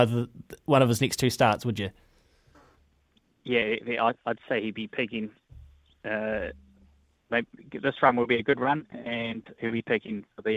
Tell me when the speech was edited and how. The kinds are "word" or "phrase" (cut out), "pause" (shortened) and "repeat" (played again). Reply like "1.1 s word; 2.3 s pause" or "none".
none